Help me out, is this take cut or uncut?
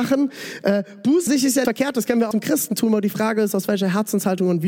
cut